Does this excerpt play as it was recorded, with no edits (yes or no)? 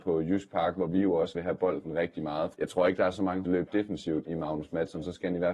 no